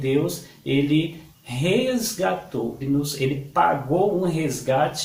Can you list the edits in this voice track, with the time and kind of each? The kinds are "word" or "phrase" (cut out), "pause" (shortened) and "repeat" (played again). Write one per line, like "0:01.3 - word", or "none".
0:02.8 - word